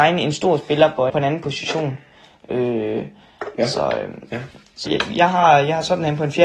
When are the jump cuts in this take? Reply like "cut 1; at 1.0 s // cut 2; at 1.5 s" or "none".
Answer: cut 1; at 1.1 s // cut 2; at 4.9 s